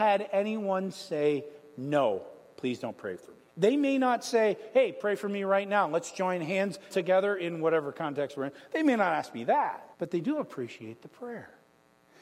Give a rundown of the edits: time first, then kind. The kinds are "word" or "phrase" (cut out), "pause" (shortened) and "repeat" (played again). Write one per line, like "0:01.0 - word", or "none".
0:03.5 - pause
0:06.9 - word
0:09.9 - pause